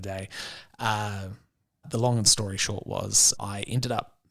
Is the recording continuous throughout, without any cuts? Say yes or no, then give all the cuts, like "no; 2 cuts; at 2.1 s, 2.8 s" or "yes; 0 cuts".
no; 2 cuts; at 1.8 s, 3.4 s